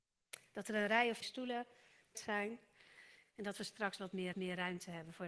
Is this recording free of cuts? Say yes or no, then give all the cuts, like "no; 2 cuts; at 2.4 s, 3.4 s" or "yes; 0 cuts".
no; 4 cuts; at 1.2 s, 2.1 s, 4.0 s, 4.3 s